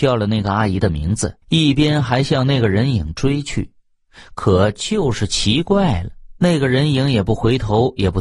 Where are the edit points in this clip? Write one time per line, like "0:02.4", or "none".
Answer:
0:01.4